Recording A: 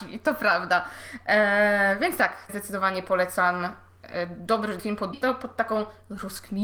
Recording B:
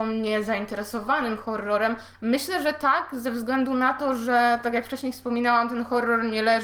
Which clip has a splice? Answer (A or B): A